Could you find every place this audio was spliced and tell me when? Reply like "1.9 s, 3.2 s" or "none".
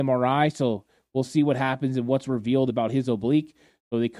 none